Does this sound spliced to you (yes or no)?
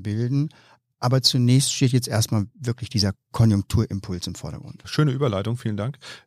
no